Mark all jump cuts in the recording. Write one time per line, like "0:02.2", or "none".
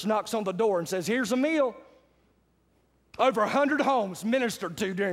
none